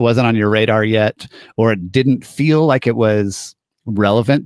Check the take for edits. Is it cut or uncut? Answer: uncut